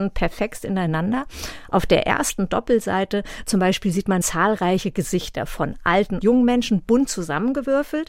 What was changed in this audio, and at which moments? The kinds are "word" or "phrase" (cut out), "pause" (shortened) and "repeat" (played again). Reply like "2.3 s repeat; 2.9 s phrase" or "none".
4.2 s word; 6.2 s word